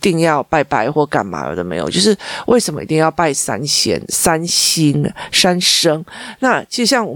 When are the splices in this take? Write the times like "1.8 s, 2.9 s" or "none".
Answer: none

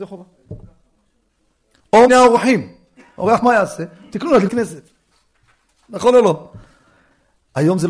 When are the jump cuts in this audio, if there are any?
2.1 s, 3.4 s, 4.5 s

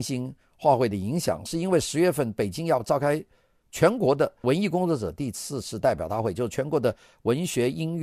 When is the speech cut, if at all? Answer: none

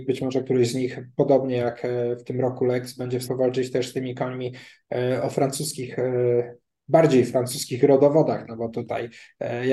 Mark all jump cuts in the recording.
3.2 s

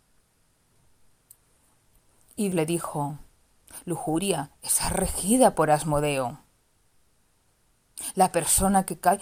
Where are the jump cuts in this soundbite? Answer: 2.5 s

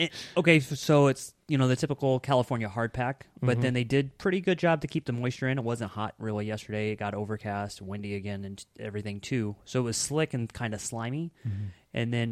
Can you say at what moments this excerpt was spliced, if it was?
none

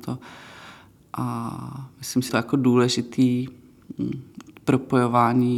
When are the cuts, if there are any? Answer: 2.3 s

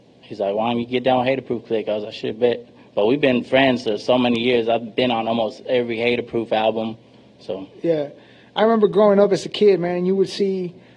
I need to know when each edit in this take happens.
none

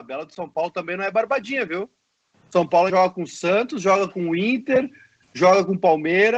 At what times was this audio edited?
2.9 s

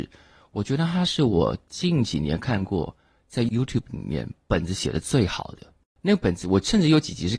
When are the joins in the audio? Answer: none

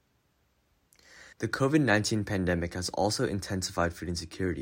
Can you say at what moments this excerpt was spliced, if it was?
1.3 s

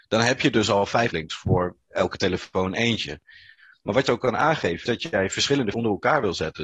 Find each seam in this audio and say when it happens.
1.1 s, 4.1 s, 4.8 s, 5.7 s

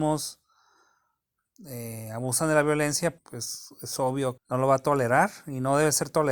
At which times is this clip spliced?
3.2 s, 4.4 s

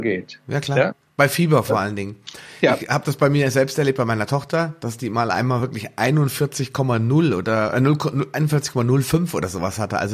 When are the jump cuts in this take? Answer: none

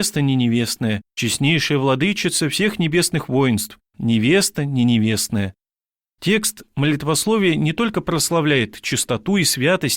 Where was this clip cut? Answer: 1.1 s, 3.9 s

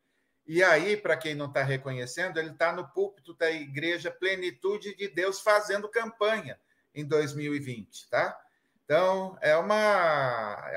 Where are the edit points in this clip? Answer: none

